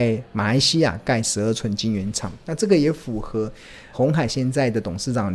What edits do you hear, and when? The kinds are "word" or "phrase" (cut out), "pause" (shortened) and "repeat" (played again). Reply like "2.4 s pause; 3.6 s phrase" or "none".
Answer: 3.9 s word

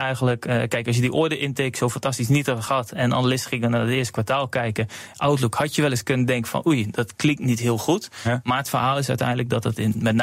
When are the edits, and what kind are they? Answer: none

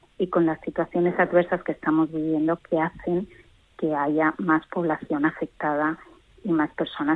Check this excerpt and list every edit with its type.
none

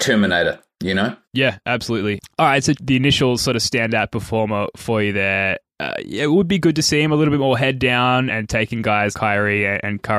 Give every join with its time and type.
1.2 s pause; 2.7 s phrase; 8.3 s word; 9.1 s word

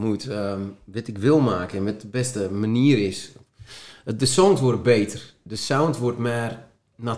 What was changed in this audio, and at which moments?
none

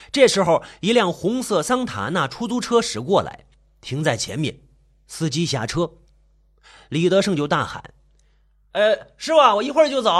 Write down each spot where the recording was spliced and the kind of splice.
none

